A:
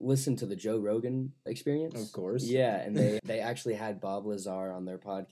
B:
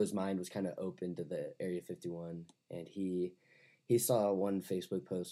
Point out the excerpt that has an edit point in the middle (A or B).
A